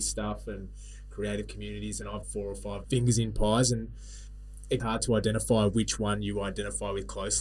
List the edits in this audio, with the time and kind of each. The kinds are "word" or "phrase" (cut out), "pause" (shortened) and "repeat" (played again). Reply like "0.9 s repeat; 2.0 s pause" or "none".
2.2 s word; 2.8 s word; 4.8 s word